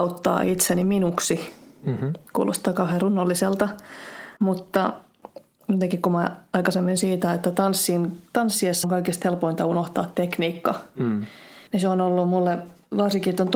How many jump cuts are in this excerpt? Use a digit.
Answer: 5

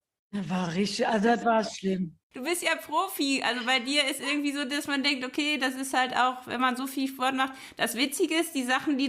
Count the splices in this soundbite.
1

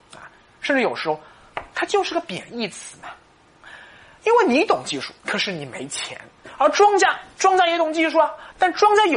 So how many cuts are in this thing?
1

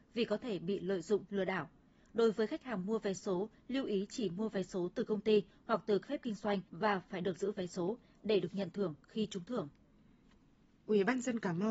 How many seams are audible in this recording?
3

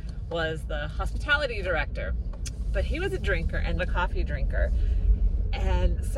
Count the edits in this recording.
2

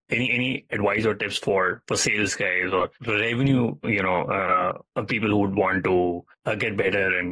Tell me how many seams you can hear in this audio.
3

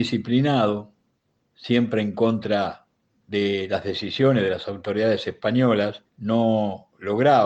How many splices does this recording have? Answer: 1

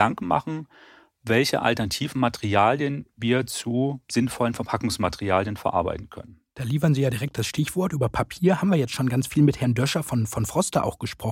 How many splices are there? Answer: 0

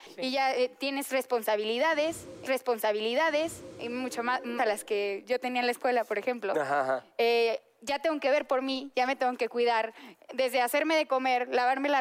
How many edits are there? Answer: 2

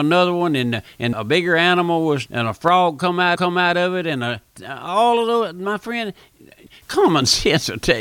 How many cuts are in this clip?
3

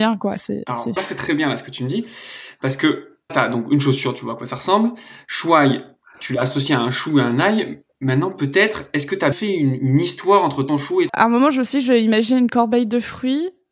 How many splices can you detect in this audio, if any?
5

